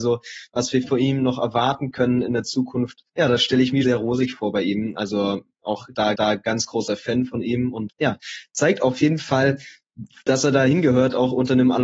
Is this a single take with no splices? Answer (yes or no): no